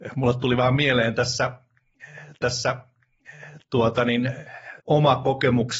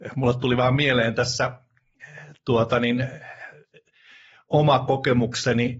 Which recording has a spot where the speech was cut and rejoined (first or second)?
first